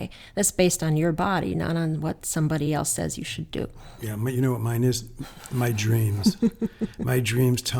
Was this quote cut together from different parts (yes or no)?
no